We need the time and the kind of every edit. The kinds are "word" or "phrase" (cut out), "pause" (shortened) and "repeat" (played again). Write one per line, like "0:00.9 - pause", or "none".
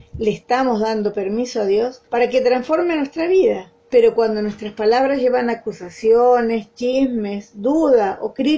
0:02.1 - pause
0:03.8 - pause